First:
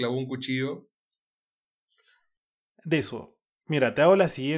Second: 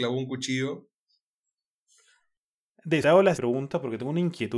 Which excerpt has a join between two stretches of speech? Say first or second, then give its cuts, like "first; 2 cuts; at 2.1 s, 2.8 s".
second; 2 cuts; at 3.0 s, 3.3 s